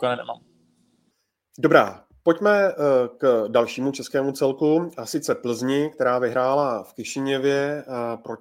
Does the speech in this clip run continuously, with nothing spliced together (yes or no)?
yes